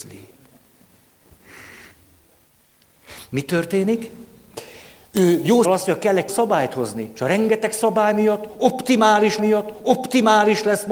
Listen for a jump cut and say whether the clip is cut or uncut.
cut